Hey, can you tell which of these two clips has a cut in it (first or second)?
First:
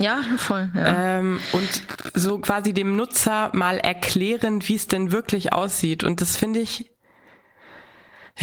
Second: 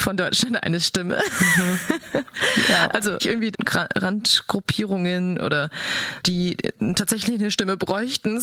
second